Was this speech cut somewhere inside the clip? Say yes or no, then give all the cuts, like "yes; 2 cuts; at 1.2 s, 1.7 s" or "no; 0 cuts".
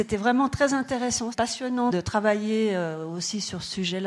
yes; 2 cuts; at 1.3 s, 1.9 s